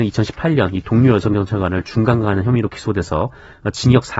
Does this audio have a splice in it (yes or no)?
no